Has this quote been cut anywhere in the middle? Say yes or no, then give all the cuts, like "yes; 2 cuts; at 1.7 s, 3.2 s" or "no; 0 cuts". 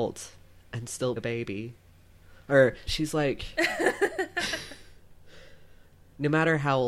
yes; 2 cuts; at 1.2 s, 2.9 s